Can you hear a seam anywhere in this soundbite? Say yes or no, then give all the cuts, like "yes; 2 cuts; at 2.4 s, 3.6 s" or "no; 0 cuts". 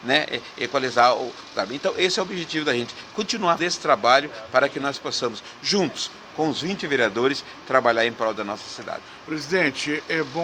yes; 1 cut; at 3.6 s